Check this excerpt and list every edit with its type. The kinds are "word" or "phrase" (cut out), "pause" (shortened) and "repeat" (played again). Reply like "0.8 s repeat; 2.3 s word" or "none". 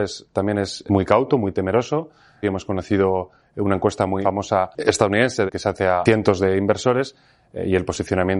none

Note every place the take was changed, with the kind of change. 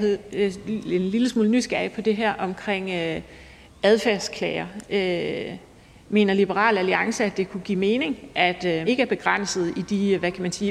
8.9 s word

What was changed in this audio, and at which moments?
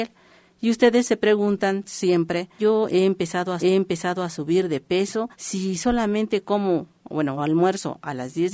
2.6 s phrase; 3.6 s repeat; 5.3 s pause; 7.4 s word

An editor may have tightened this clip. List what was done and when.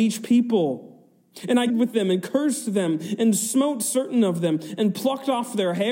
1.7 s word

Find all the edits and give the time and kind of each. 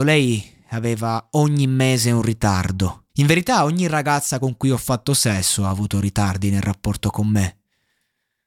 3.1 s pause

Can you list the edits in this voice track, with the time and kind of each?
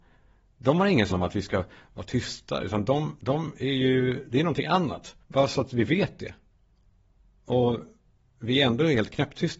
1.1 s phrase; 5.2 s pause

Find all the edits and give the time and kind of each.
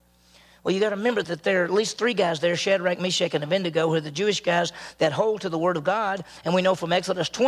none

